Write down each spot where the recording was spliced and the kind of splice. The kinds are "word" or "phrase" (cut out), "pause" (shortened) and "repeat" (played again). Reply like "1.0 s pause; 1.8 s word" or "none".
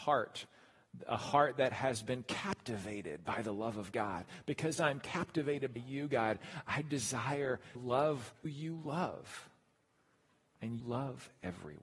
5.8 s word; 7.7 s word; 8.4 s word; 10.8 s word